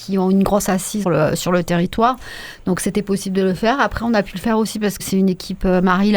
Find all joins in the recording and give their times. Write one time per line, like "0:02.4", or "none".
0:01.0
0:05.0